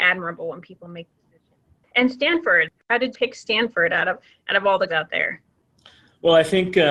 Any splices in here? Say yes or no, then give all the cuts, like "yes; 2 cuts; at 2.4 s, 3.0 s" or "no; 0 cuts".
yes; 3 cuts; at 1.1 s, 3.1 s, 4.9 s